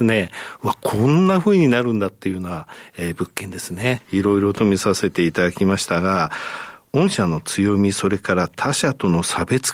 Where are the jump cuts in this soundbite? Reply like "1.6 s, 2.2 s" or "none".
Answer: none